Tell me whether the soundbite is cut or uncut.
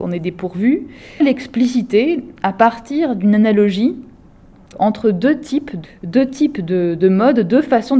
cut